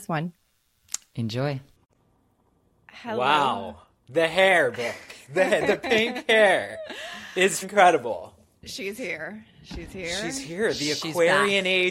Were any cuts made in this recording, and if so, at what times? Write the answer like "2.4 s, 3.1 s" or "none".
7.6 s